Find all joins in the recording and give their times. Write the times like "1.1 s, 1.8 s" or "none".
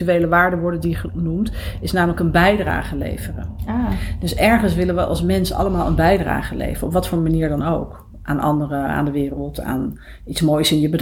none